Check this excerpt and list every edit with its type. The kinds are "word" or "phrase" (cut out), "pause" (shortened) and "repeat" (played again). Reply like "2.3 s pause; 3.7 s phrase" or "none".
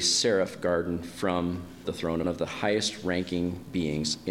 1.8 s word; 2.2 s phrase

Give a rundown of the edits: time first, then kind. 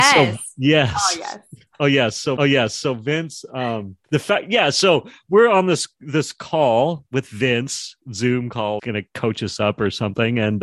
2.4 s repeat; 4.0 s pause; 8.8 s phrase

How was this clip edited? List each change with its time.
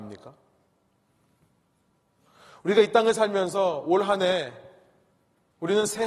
none

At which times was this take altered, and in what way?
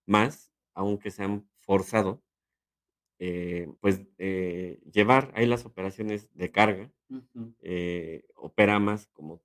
3.8 s pause

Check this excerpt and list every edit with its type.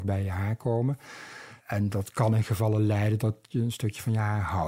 1.6 s pause

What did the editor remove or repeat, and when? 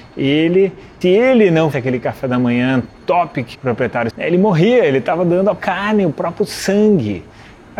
1.0 s word; 1.7 s word; 3.5 s word; 4.1 s word; 5.6 s word

